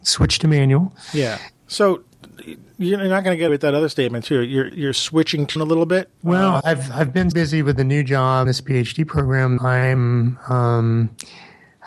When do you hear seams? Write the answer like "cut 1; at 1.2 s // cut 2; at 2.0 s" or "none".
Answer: cut 1; at 1.6 s // cut 2; at 3.5 s // cut 3; at 4.7 s // cut 4; at 5.6 s // cut 5; at 6.1 s // cut 6; at 6.6 s // cut 7; at 7.3 s // cut 8; at 8.5 s // cut 9; at 9.6 s